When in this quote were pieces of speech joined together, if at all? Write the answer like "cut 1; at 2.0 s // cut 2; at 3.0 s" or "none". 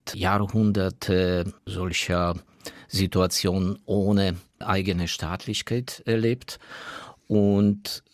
cut 1; at 1.6 s